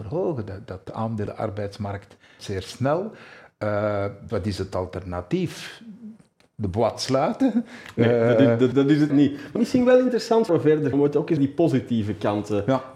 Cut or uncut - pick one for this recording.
cut